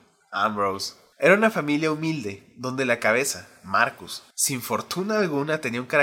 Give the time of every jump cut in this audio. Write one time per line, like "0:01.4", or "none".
0:04.3